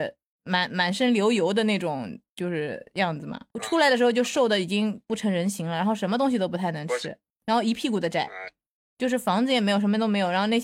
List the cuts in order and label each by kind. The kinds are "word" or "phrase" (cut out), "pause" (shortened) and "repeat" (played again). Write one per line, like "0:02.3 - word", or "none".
0:03.5 - pause

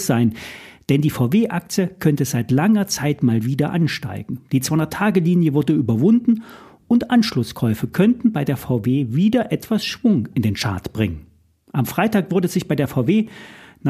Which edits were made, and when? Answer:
none

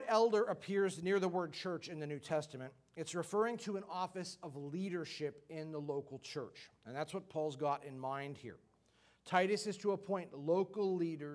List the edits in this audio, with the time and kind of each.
none

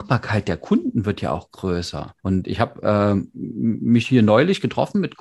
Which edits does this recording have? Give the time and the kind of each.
0:02.2 - pause

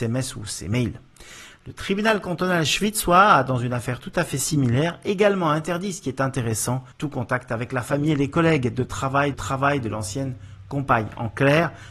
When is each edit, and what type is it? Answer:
0:06.9 - pause
0:09.3 - repeat

